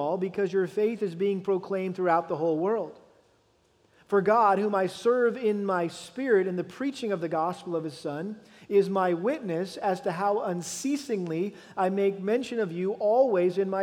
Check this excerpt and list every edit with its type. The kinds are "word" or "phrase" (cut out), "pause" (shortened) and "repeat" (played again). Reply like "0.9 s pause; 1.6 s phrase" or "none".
none